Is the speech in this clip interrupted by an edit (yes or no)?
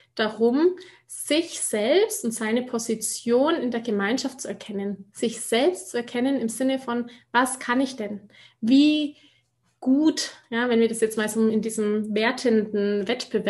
no